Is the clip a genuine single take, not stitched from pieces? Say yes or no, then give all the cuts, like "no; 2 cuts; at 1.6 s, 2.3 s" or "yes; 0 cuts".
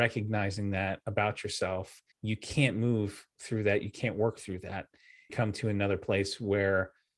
no; 2 cuts; at 2.1 s, 5.3 s